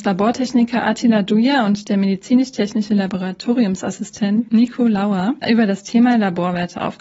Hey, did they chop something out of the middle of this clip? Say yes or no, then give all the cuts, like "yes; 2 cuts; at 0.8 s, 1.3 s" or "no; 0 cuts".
no; 0 cuts